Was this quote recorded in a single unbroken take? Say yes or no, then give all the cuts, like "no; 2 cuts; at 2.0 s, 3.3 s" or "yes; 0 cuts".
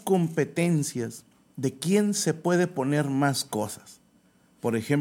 no; 1 cut; at 1.5 s